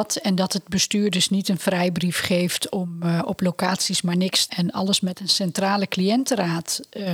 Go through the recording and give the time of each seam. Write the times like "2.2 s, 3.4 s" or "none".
4.5 s